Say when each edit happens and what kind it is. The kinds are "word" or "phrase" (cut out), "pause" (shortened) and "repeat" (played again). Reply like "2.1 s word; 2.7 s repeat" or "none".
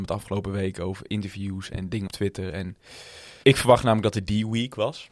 1.1 s word; 1.7 s word; 2.1 s word; 3.4 s word